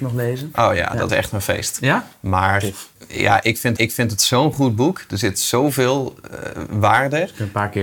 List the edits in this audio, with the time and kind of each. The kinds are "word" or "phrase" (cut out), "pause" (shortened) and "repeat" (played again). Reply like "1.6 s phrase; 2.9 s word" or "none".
1.1 s phrase; 3.0 s pause; 3.8 s repeat; 5.3 s phrase